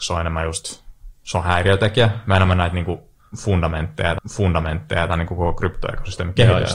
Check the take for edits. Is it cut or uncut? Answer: cut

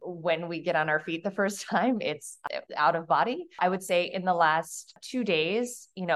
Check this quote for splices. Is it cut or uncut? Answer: cut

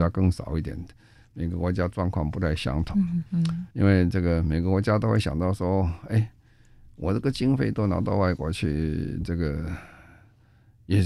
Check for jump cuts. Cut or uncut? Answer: cut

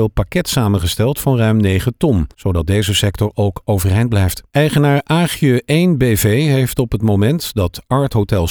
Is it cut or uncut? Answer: cut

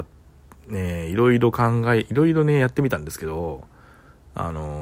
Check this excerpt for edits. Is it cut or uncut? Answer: uncut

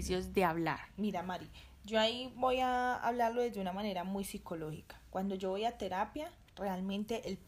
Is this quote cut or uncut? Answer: uncut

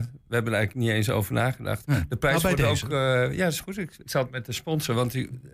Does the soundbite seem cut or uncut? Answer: cut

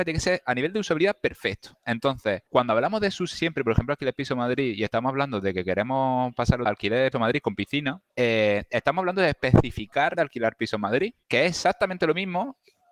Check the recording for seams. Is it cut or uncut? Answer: cut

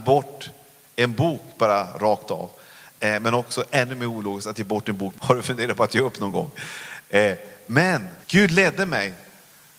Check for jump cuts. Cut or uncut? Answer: cut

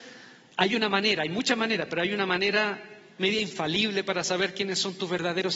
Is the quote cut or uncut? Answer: uncut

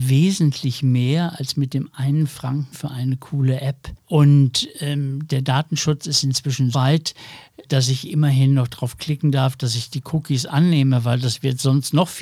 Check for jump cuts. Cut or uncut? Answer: cut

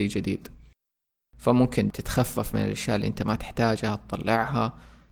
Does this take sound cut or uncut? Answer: uncut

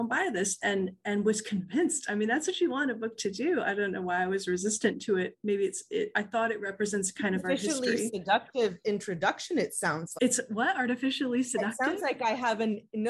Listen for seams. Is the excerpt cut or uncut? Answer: cut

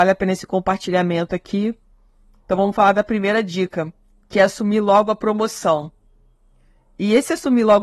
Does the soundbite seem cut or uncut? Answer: uncut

